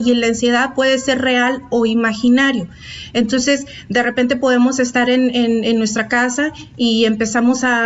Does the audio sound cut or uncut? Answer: uncut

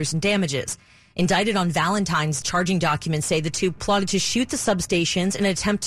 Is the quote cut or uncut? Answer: cut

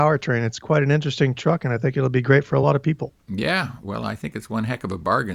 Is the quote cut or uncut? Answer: uncut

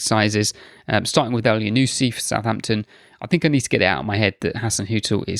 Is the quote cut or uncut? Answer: uncut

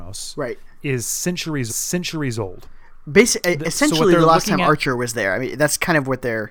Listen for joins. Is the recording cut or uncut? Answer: cut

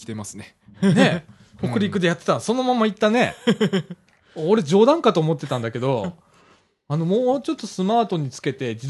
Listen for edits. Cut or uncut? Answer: uncut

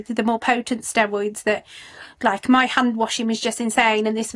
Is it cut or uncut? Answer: uncut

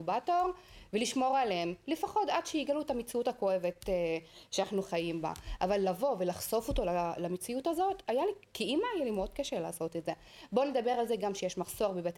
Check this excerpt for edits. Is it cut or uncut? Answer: uncut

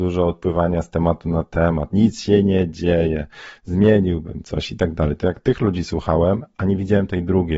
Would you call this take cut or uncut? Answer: uncut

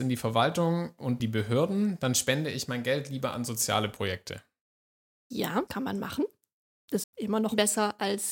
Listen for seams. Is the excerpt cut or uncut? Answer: cut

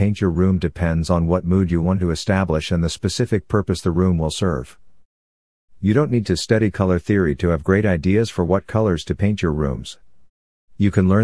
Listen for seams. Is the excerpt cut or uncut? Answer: uncut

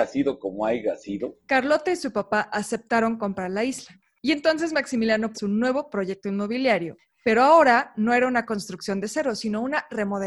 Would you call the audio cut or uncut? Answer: cut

